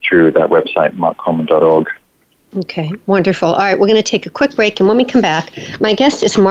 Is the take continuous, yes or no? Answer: yes